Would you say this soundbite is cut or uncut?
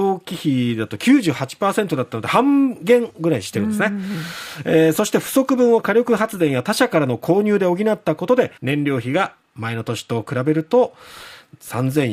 cut